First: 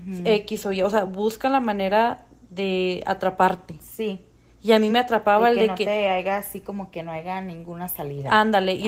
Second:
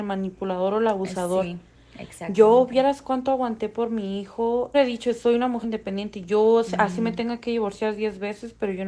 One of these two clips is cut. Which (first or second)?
second